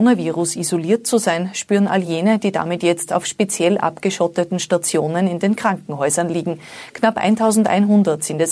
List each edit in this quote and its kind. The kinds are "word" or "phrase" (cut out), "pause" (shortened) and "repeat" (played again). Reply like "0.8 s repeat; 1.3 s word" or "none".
none